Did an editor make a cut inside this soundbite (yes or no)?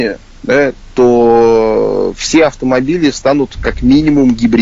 no